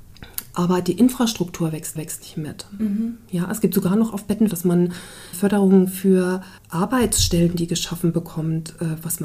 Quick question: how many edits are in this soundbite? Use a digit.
4